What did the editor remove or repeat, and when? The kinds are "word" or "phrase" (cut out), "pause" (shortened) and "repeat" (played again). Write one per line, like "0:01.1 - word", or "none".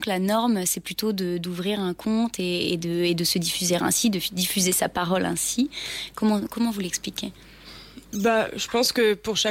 0:08.0 - pause